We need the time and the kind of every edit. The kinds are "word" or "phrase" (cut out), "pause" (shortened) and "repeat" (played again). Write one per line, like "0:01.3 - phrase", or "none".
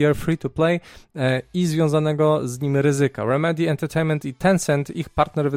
none